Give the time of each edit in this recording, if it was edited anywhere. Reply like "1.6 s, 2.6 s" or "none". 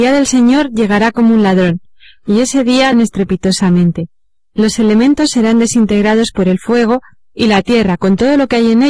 2.9 s